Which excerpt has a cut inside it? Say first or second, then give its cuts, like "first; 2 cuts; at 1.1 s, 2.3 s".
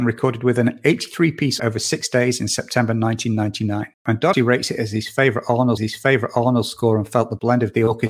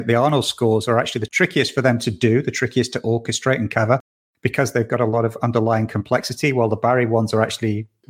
first; 4 cuts; at 1.6 s, 3.9 s, 4.3 s, 5.8 s